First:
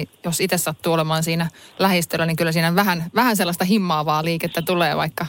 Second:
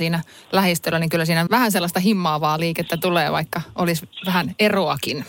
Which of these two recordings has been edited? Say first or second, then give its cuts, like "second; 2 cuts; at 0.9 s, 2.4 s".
second; 1 cut; at 1.5 s